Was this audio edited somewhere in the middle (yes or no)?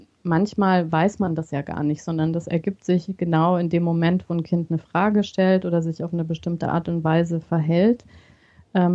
no